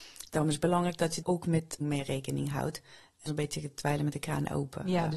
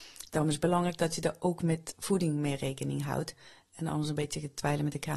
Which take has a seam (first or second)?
first